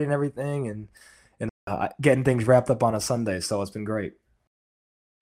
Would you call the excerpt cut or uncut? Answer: uncut